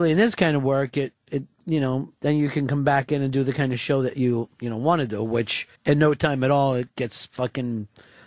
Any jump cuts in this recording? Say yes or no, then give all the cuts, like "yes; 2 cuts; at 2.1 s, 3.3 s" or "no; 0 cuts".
yes; 2 cuts; at 2.2 s, 5.8 s